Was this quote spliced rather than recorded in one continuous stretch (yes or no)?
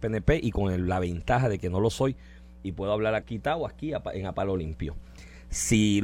yes